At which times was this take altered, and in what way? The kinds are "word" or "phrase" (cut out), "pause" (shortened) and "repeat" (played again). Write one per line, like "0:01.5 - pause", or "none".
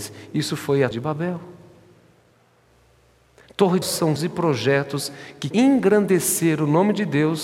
0:00.9 - word
0:03.8 - word
0:04.2 - word
0:05.5 - word